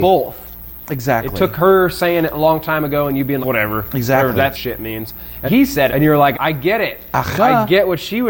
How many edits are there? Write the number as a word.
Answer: five